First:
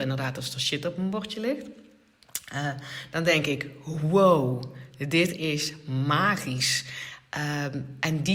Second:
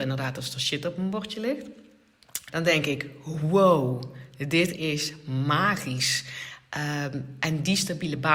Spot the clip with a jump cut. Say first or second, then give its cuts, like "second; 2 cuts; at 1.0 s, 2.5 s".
second; 1 cut; at 2.5 s